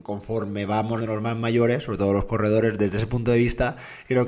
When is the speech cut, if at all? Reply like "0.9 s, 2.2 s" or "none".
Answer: 1.0 s